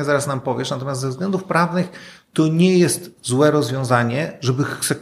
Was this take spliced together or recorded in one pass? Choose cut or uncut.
uncut